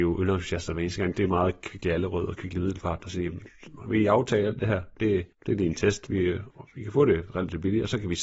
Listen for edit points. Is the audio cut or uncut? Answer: cut